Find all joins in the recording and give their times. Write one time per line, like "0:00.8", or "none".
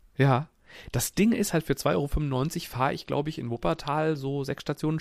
none